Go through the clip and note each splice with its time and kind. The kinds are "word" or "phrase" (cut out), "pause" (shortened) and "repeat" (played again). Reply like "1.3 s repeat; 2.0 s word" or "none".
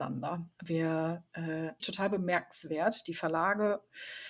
1.8 s phrase